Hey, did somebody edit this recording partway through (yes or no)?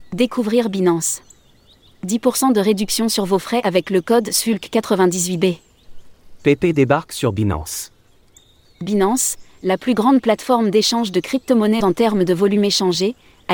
yes